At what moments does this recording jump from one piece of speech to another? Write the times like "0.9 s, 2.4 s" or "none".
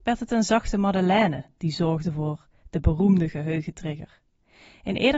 none